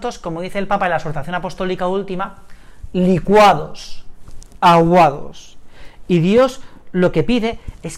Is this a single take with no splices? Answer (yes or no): yes